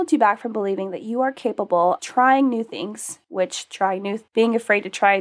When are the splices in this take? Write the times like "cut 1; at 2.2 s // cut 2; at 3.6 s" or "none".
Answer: cut 1; at 2.0 s // cut 2; at 3.2 s // cut 3; at 4.3 s